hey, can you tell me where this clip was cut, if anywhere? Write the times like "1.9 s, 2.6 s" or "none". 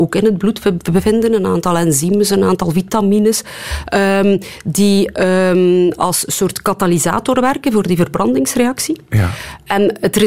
none